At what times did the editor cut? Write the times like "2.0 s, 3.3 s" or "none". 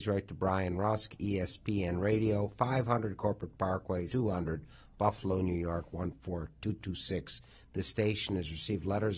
4.1 s